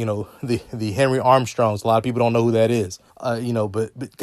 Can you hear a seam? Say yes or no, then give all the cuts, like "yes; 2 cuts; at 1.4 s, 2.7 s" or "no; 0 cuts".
yes; 1 cut; at 3.1 s